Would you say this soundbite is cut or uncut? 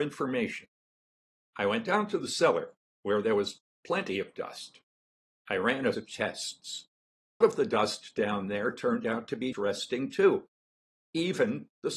cut